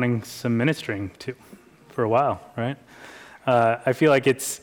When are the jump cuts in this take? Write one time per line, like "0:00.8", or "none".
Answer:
none